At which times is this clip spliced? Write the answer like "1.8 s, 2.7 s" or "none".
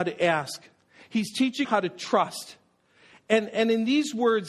1.6 s

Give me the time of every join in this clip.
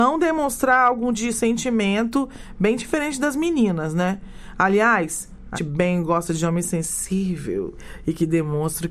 1.1 s, 5.6 s

